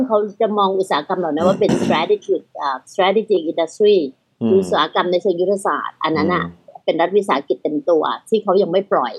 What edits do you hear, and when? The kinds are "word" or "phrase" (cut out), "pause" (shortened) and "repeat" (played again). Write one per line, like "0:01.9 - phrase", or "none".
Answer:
none

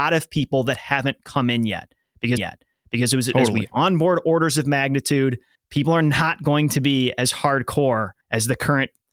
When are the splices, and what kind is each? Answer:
0:02.4 - repeat
0:05.5 - pause
0:08.2 - pause

